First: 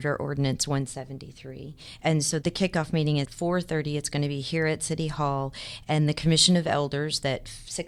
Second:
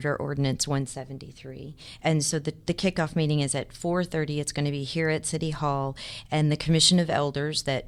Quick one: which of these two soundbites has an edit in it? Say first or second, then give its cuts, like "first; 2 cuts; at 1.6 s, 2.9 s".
first; 2 cuts; at 2.4 s, 3.2 s